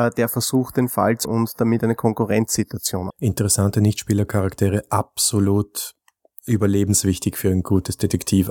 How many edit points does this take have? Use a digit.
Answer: 2